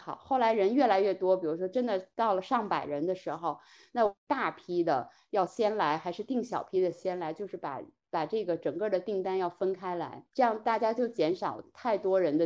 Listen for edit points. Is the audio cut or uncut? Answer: uncut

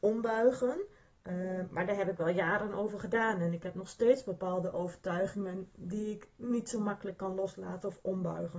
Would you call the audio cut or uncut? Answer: uncut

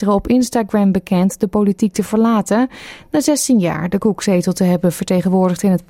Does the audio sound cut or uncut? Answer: uncut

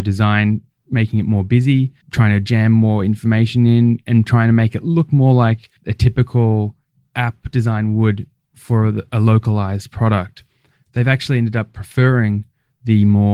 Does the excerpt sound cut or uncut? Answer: cut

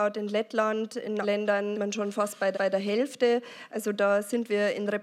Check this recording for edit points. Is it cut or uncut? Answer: cut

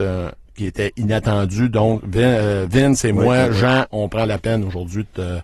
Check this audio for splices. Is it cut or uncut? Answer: uncut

